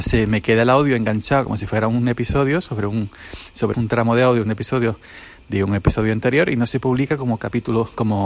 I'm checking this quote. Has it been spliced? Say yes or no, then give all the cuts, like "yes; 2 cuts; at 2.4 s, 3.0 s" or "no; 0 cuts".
yes; 1 cut; at 3.7 s